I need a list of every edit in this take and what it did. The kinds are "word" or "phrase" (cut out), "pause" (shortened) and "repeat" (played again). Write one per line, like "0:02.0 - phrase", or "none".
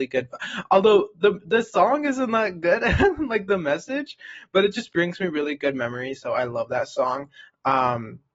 none